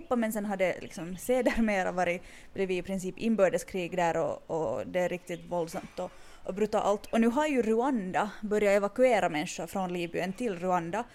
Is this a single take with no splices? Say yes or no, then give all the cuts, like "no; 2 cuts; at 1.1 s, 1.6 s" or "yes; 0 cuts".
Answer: yes; 0 cuts